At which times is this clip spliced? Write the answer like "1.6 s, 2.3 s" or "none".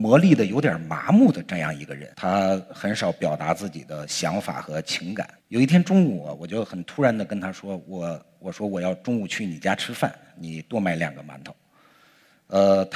2.1 s, 5.4 s